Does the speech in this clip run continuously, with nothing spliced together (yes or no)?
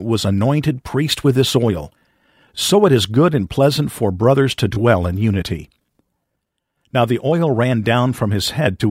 yes